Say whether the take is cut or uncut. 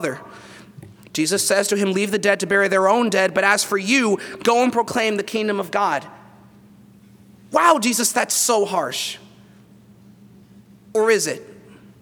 uncut